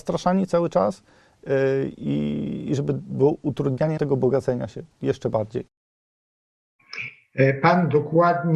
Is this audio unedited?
no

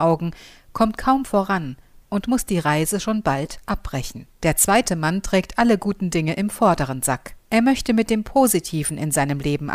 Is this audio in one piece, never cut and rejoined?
no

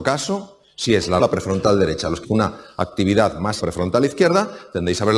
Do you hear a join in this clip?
yes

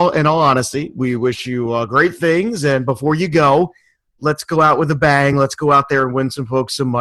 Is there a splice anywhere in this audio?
no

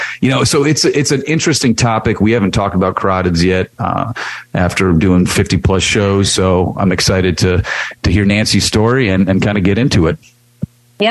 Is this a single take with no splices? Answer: yes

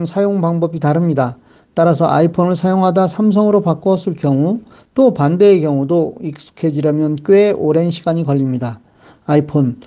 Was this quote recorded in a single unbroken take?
yes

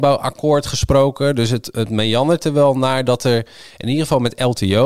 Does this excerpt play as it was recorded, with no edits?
yes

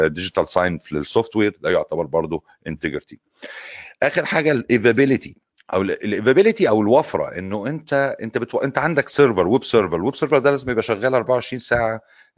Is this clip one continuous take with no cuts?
no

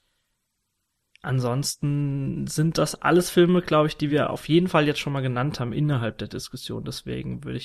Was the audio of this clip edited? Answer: no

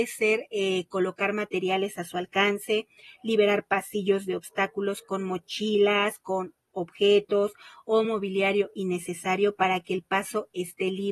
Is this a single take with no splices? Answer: yes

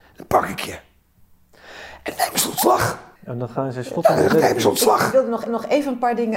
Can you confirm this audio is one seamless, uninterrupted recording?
no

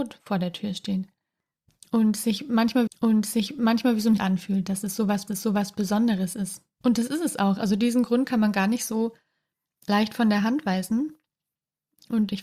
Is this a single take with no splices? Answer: no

